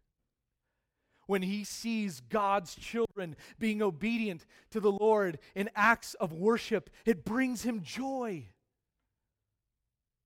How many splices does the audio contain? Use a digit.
0